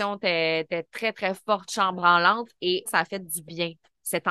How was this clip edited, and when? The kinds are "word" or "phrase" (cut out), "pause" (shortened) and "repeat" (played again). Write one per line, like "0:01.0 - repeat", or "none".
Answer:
0:02.9 - word